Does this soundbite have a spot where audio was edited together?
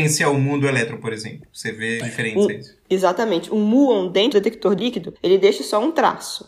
yes; 4 cuts; at 2.0 s, 4.3 s, 4.8 s, 5.2 s

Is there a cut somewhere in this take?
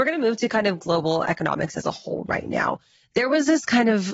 no; 0 cuts

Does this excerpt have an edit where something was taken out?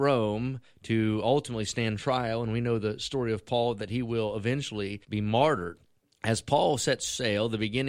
yes; 2 cuts; at 5.0 s, 6.0 s

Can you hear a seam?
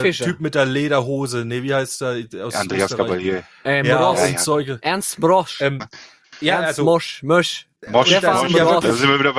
yes; 2 cuts; at 6.2 s, 7.8 s

